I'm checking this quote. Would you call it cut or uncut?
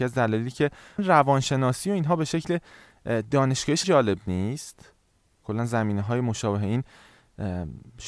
cut